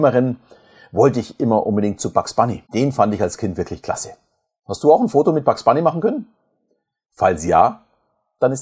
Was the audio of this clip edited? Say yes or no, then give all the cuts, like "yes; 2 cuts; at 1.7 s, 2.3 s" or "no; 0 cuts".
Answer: yes; 1 cut; at 2.7 s